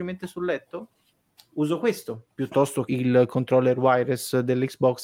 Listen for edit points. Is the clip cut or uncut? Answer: cut